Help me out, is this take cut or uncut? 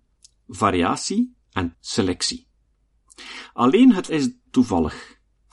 cut